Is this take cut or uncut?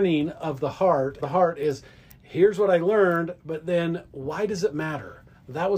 cut